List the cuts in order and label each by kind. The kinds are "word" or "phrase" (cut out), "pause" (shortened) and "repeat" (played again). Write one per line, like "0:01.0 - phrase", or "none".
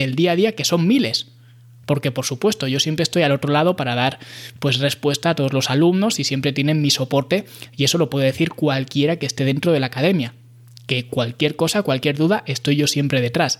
none